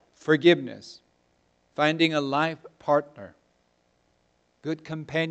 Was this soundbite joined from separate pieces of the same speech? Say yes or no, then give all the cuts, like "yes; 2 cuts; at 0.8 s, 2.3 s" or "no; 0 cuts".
no; 0 cuts